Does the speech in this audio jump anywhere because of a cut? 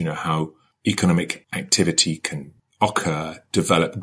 no; 0 cuts

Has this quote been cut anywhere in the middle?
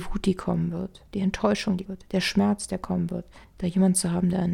yes; 3 cuts; at 1.1 s, 1.9 s, 3.4 s

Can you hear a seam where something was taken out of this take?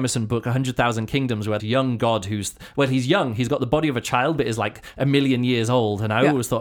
yes; 1 cut; at 1.6 s

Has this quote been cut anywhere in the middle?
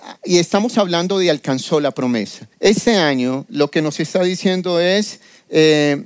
yes; 1 cut; at 2.5 s

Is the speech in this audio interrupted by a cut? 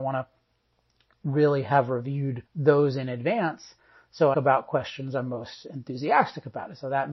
yes; 2 cuts; at 2.5 s, 4.3 s

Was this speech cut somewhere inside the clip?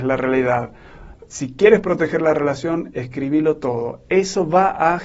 no; 0 cuts

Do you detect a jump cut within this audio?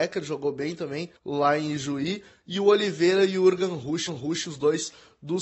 yes; 2 cuts; at 1.2 s, 4.1 s

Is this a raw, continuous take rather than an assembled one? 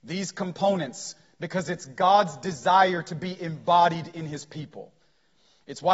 yes; 0 cuts

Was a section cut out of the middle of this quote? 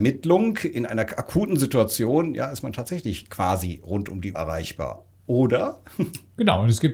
yes; 1 cut; at 4.3 s

